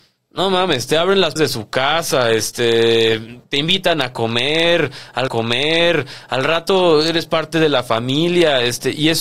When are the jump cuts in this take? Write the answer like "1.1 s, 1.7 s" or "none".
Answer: 1.4 s, 3.4 s, 5.3 s